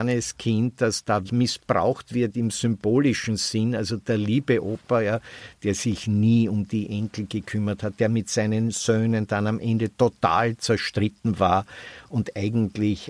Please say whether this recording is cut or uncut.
cut